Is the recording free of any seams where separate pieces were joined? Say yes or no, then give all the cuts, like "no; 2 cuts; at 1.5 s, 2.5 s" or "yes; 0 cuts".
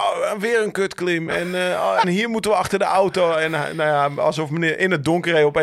no; 1 cut; at 2.0 s